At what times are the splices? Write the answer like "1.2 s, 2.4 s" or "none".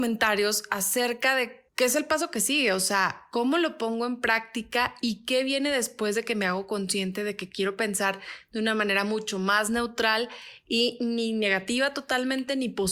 1.7 s